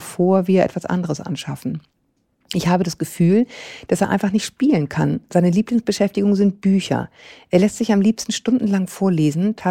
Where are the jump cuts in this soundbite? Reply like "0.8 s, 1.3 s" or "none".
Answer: none